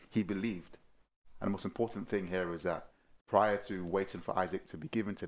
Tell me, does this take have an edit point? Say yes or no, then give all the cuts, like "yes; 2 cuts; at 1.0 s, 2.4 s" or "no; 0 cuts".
yes; 1 cut; at 3.2 s